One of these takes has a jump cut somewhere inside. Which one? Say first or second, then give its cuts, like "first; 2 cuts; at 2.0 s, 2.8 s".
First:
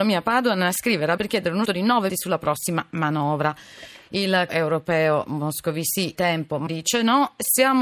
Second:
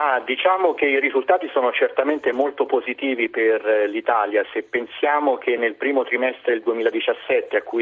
first; 6 cuts; at 1.2 s, 1.6 s, 2.1 s, 4.5 s, 6.1 s, 6.7 s